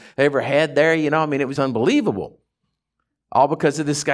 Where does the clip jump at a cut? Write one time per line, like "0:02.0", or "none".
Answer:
0:01.6